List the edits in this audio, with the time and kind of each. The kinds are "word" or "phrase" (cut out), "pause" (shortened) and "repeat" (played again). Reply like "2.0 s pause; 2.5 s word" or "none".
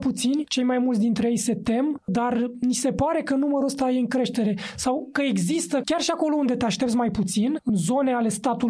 none